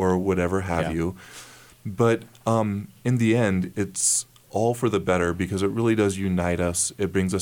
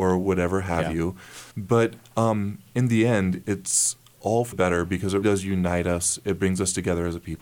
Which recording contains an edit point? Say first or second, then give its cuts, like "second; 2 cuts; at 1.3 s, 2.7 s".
second; 3 cuts; at 1.5 s, 4.5 s, 5.2 s